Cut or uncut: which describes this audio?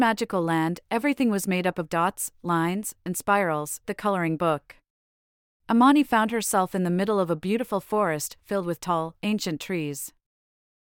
cut